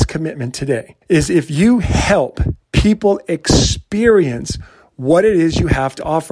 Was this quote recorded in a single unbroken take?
no; 1 cut; at 1.0 s

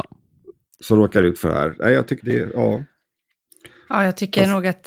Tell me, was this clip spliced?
yes; 1 cut; at 2.2 s

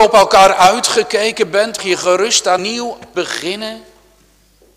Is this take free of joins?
no; 3 cuts; at 1.8 s, 2.6 s, 3.1 s

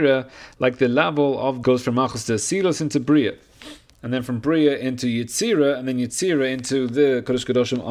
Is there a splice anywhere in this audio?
yes; 1 cut; at 1.6 s

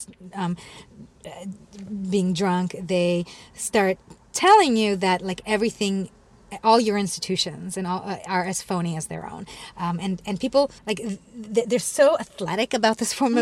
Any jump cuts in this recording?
yes; 1 cut; at 10.8 s

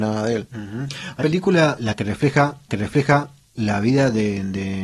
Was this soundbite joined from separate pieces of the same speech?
yes; 3 cuts; at 1.2 s, 1.8 s, 2.7 s

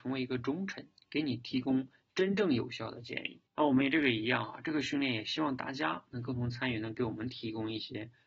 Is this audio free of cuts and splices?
no; 1 cut; at 3.5 s

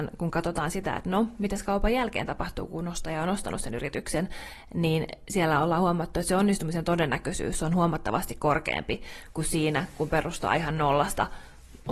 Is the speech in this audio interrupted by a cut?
no; 0 cuts

